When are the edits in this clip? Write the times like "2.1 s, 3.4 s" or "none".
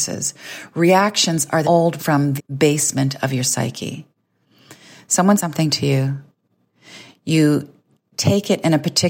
1.6 s, 2.0 s, 2.4 s, 5.4 s